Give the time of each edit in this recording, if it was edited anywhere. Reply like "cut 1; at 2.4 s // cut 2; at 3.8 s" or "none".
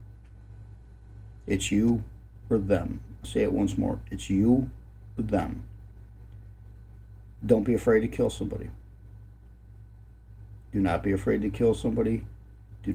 cut 1; at 3.2 s // cut 2; at 10.6 s